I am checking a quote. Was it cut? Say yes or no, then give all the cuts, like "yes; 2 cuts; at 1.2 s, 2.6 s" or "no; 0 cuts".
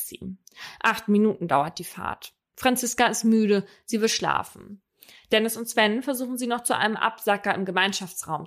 no; 0 cuts